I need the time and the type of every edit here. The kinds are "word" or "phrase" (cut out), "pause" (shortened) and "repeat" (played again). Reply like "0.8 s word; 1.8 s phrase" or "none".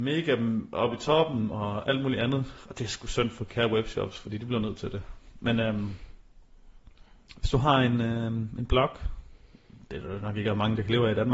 none